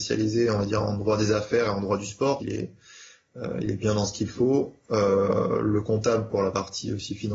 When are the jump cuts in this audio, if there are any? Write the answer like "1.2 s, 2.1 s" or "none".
2.4 s

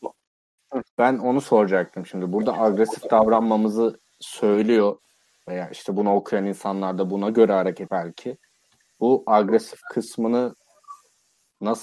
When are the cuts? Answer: 7.9 s

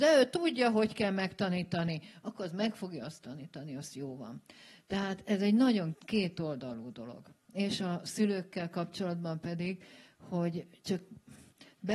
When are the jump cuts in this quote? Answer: 5.9 s

